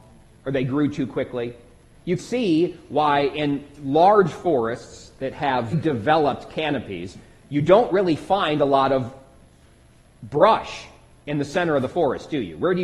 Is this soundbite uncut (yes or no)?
no